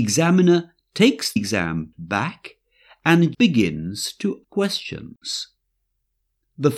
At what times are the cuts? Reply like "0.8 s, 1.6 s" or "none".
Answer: 1.4 s, 1.9 s, 3.3 s, 4.4 s